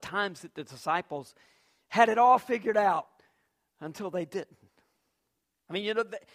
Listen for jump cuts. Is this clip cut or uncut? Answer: uncut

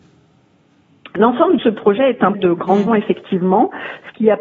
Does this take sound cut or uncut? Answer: cut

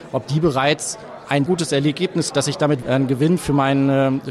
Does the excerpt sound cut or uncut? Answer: cut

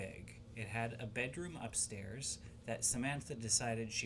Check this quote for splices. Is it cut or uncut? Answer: uncut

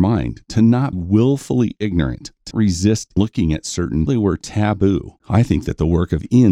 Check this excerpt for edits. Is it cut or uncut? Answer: cut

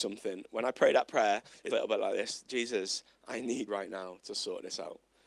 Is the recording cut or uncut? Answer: cut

